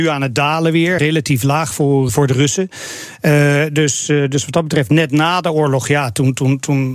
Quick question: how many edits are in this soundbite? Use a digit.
2